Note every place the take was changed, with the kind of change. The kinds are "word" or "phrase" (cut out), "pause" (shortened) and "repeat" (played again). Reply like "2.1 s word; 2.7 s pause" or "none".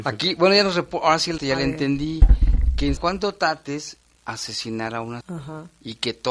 1.4 s word; 3.0 s word; 4.2 s word; 5.2 s word